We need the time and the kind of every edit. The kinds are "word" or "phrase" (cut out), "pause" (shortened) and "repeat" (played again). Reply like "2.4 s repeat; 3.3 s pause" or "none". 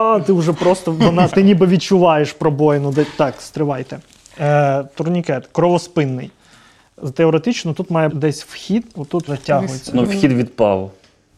1.3 s word; 8.1 s word; 9.3 s word; 10.0 s word